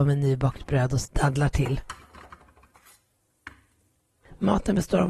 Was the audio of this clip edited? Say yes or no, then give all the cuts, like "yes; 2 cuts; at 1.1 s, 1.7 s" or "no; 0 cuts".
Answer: yes; 1 cut; at 1.0 s